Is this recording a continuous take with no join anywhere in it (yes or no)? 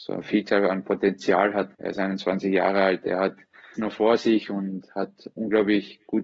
no